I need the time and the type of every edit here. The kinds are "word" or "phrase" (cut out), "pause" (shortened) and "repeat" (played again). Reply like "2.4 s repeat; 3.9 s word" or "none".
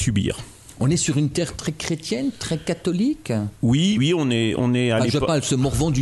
1.6 s word; 4.0 s word